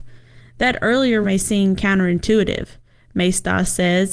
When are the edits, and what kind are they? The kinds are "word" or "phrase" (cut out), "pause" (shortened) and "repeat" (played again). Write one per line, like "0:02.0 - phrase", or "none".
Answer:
0:01.2 - phrase